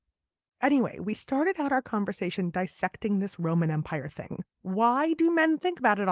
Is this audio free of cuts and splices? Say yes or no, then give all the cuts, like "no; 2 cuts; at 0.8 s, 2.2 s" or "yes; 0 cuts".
no; 1 cut; at 4.5 s